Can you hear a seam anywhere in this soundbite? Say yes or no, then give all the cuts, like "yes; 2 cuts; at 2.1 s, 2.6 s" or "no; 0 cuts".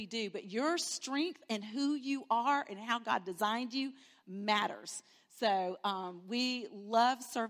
no; 0 cuts